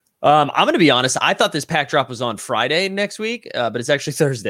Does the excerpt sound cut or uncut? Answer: uncut